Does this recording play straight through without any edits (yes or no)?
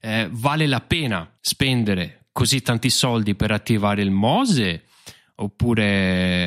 no